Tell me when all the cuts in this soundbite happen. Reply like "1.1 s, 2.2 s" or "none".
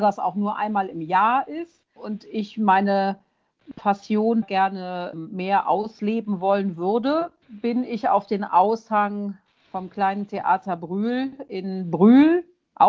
2.0 s, 4.4 s, 5.1 s, 7.4 s

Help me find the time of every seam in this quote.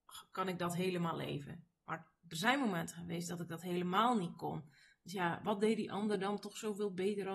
none

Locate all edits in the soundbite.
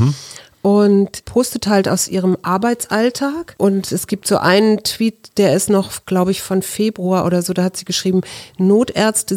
none

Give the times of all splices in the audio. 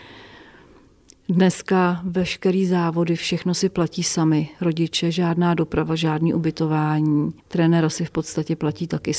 7.4 s

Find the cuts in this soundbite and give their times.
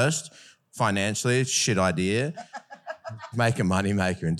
3.3 s

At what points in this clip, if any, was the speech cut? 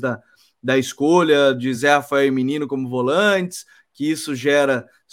none

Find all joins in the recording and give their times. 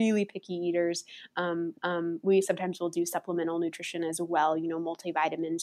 1.7 s

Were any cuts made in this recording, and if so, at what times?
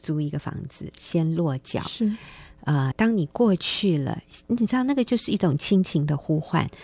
2.9 s, 4.4 s

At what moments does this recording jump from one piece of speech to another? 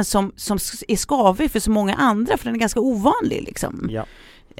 none

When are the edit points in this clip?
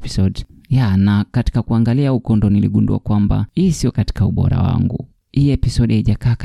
none

